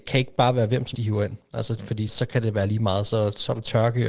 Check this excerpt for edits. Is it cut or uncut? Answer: cut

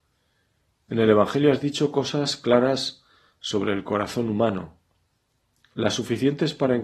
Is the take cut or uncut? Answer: uncut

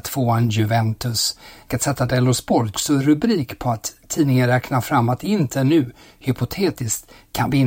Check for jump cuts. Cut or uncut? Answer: cut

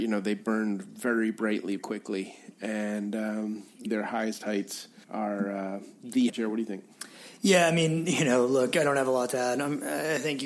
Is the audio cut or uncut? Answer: cut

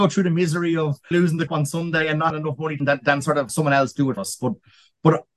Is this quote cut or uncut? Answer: cut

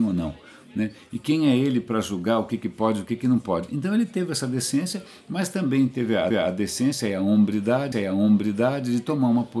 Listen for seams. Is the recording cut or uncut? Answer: cut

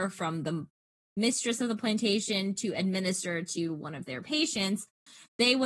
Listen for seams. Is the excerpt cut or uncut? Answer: uncut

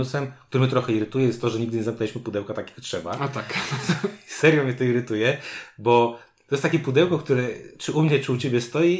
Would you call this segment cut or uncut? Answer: uncut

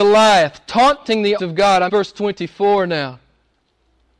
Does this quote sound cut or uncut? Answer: cut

